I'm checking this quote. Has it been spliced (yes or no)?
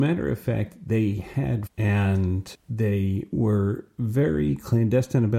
yes